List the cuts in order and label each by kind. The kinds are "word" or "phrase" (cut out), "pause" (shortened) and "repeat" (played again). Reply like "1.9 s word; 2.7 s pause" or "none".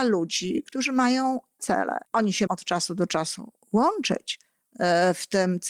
1.6 s word; 2.1 s pause; 2.5 s word